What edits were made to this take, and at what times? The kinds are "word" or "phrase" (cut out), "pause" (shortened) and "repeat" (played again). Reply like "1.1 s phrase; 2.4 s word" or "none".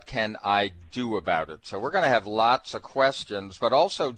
none